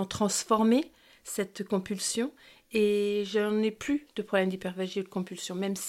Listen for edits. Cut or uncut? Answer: uncut